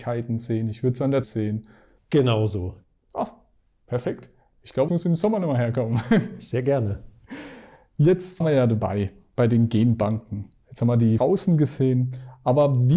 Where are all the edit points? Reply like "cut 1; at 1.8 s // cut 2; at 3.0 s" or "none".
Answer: cut 1; at 1.2 s // cut 2; at 4.9 s // cut 3; at 8.4 s // cut 4; at 11.2 s